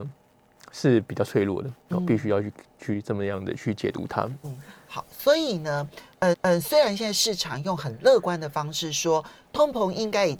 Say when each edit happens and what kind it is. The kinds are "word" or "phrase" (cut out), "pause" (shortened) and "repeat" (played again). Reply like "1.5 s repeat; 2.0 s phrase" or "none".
4.4 s word; 6.3 s repeat